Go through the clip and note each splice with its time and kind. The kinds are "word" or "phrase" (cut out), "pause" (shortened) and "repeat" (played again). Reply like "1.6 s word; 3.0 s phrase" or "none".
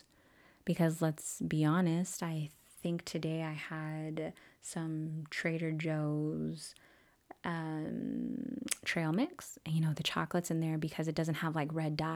none